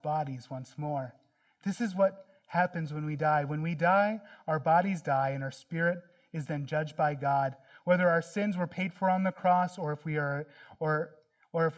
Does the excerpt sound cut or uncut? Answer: uncut